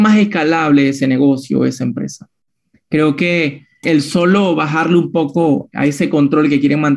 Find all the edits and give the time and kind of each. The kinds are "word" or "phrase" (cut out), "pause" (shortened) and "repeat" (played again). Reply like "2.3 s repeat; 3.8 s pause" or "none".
3.8 s word; 5.7 s word